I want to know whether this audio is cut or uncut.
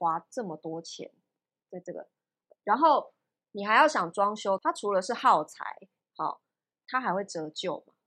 uncut